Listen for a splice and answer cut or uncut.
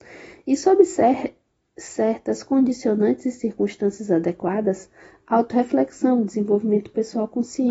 uncut